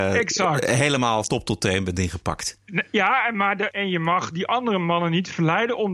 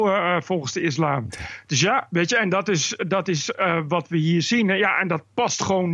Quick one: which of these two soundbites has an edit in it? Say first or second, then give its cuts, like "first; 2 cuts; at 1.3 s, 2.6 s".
first; 2 cuts; at 1.2 s, 3.7 s